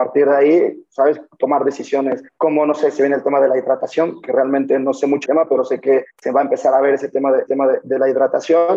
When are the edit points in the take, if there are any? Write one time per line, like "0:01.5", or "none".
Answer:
0:02.3
0:05.2
0:06.1
0:07.5